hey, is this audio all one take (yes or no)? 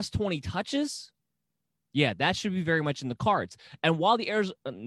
yes